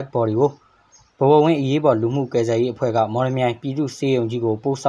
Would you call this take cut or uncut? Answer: uncut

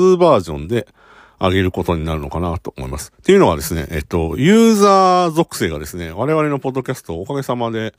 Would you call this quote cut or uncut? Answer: uncut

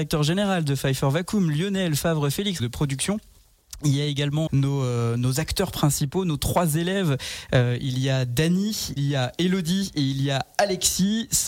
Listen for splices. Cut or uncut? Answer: cut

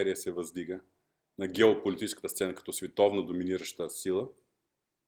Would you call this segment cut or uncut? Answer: uncut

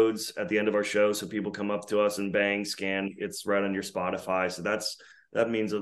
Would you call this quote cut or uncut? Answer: uncut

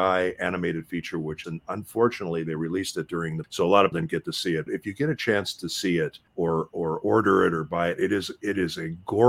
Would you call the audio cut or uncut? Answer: cut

